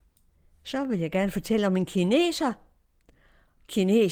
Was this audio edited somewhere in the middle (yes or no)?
no